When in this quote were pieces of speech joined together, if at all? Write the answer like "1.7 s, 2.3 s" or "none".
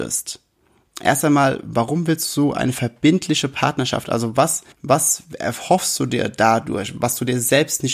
4.7 s